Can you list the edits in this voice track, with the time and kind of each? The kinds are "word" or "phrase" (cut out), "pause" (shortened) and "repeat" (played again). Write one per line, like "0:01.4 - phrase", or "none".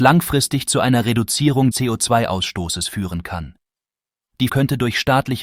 0:01.7 - word
0:04.5 - word